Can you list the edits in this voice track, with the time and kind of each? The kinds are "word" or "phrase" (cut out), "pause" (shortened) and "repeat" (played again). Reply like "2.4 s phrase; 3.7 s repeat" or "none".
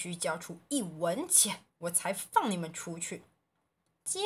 1.7 s pause